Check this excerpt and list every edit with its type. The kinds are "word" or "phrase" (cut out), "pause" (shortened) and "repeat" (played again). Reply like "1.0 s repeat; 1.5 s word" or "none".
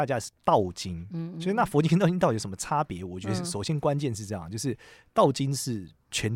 none